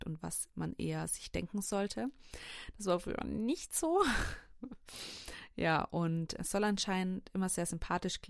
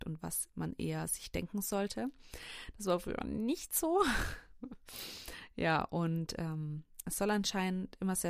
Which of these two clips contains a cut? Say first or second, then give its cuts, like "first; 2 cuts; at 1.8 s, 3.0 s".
first; 1 cut; at 6.4 s